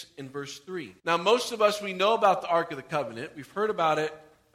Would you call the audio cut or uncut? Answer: cut